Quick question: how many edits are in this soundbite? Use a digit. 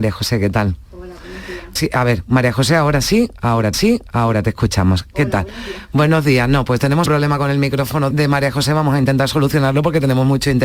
4